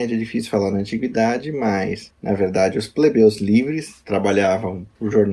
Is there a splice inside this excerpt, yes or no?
no